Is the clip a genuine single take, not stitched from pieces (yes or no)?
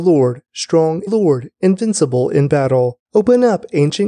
no